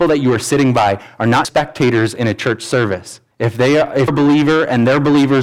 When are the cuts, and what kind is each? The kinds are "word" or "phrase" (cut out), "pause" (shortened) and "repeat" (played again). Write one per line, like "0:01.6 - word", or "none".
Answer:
0:01.4 - word
0:03.3 - pause
0:04.1 - word